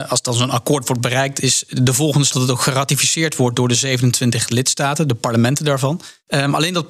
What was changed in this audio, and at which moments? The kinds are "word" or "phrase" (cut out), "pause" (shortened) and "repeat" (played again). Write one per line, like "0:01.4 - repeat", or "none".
0:02.3 - word